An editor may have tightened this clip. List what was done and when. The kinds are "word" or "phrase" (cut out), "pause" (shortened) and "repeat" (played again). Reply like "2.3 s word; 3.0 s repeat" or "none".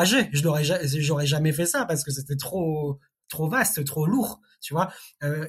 none